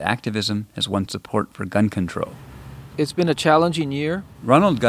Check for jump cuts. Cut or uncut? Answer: uncut